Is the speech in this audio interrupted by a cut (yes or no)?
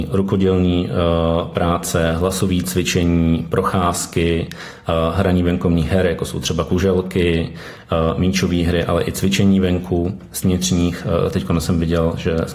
yes